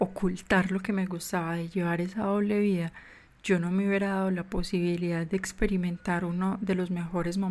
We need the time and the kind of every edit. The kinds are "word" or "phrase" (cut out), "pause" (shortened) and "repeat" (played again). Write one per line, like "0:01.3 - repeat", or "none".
none